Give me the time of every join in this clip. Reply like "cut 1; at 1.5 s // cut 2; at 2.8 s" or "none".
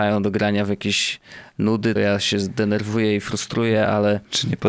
cut 1; at 2.0 s

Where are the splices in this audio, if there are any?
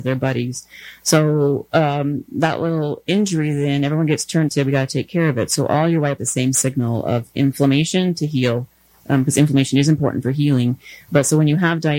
cut 1; at 4.5 s // cut 2; at 6.2 s

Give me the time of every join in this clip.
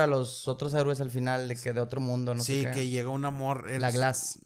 none

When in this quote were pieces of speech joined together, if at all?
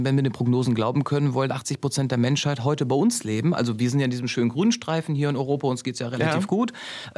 none

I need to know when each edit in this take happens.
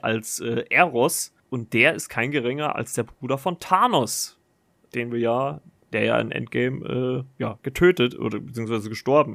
cut 1; at 1.4 s

